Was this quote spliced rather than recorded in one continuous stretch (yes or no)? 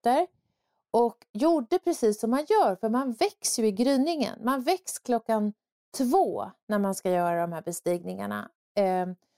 no